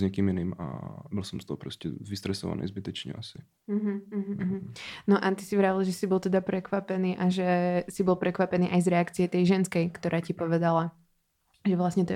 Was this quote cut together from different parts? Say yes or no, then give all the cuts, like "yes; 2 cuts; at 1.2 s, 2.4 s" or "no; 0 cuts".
no; 0 cuts